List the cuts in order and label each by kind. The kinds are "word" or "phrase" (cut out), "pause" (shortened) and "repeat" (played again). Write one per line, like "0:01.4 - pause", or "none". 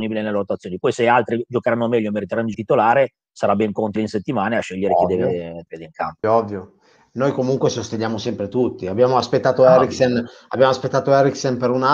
0:02.5 - word
0:04.0 - word
0:05.7 - word
0:06.2 - word